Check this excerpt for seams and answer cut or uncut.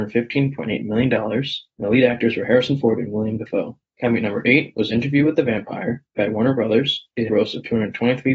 cut